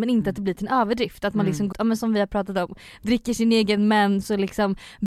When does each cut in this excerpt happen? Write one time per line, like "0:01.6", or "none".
0:01.7